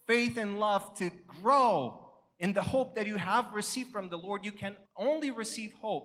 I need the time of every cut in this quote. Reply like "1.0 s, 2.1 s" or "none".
4.8 s